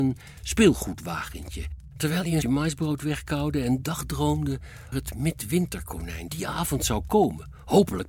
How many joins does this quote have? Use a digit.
3